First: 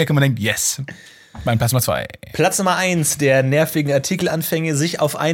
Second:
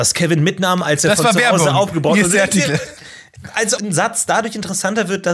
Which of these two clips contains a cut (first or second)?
second